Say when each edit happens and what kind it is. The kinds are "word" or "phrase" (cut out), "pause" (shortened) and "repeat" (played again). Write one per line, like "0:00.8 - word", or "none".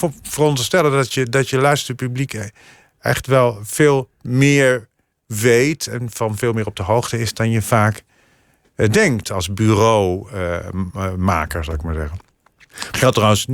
none